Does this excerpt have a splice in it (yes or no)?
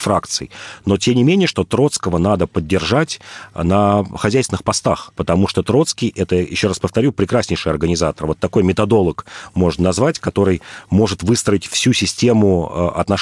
no